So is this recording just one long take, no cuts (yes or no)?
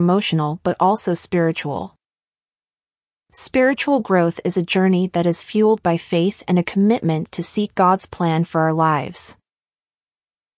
yes